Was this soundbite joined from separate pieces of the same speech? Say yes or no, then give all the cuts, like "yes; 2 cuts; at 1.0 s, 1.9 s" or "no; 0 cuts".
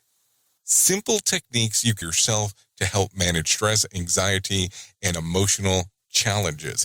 yes; 1 cut; at 2.0 s